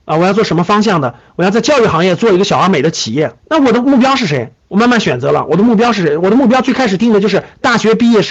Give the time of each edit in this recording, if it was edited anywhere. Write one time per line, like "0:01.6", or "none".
0:03.4
0:04.6